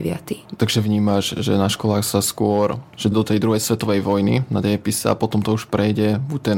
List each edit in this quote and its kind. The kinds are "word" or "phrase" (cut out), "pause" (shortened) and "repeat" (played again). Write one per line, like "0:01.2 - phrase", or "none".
0:03.1 - word